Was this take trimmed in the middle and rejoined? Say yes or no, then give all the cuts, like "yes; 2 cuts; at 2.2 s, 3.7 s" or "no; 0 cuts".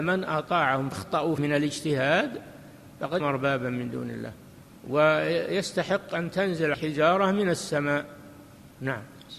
yes; 4 cuts; at 0.9 s, 1.4 s, 3.2 s, 6.7 s